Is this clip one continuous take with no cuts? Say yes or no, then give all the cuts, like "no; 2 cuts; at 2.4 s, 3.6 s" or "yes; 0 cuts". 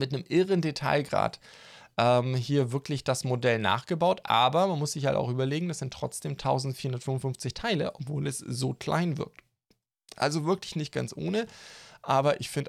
yes; 0 cuts